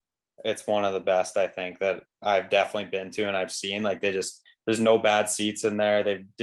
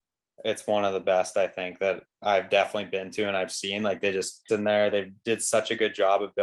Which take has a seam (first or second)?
second